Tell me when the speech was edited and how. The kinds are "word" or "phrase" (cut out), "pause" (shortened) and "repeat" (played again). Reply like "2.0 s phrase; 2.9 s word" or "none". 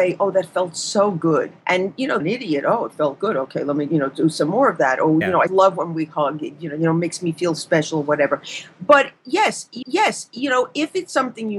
1.6 s pause; 2.2 s phrase; 3.9 s word; 5.5 s word; 7.6 s word; 9.8 s repeat